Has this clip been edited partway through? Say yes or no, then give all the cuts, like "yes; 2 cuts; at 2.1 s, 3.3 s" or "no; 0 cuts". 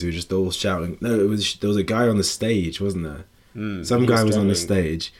no; 0 cuts